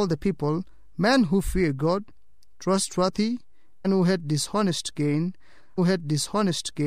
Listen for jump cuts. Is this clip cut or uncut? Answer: cut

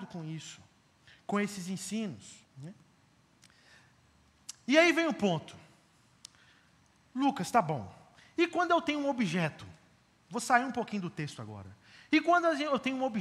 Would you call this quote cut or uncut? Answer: cut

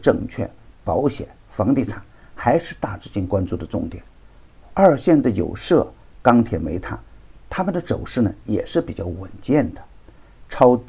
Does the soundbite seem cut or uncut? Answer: uncut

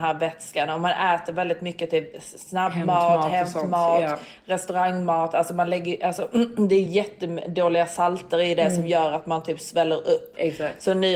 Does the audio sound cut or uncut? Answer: uncut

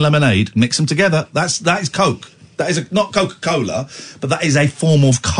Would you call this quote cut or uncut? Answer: uncut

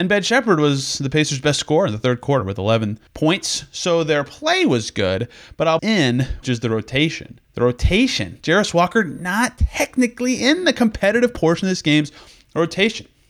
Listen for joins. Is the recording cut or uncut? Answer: cut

